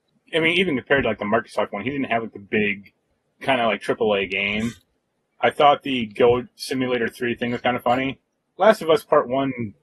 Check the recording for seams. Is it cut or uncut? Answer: uncut